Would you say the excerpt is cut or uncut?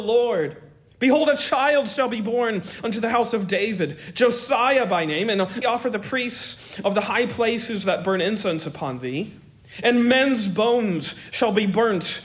cut